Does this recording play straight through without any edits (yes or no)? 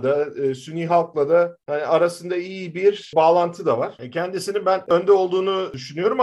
yes